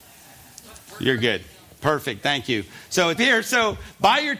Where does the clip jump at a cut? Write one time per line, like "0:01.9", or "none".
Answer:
0:03.2